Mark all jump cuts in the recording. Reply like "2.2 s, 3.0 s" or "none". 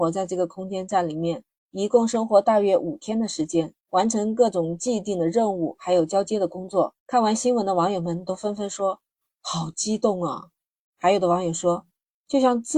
1.6 s, 3.8 s, 7.0 s, 9.1 s

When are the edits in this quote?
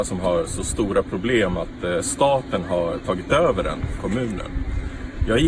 4.0 s

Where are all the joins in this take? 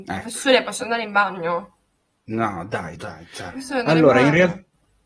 3.0 s

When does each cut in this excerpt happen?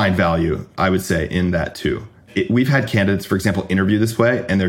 none

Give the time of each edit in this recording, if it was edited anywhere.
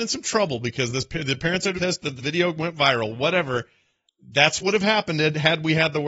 1.8 s, 2.2 s, 4.6 s

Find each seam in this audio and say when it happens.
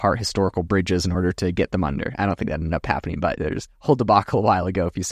none

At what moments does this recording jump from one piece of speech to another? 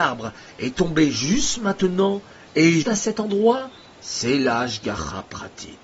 2.8 s

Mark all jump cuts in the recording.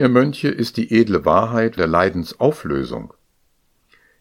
1.8 s

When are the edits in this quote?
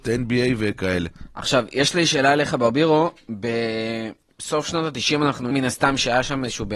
5.5 s

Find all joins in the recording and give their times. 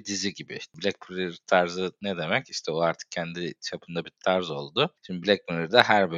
none

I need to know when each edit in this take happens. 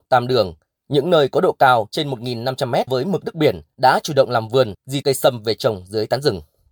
2.9 s, 5.0 s

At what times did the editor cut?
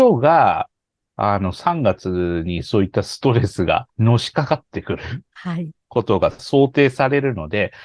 3.9 s, 5.8 s

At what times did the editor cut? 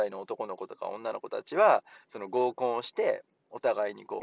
none

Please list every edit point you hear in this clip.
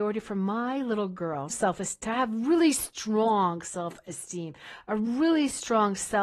1.5 s

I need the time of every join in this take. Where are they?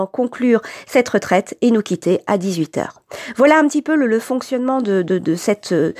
none

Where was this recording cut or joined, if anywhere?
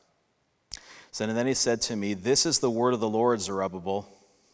none

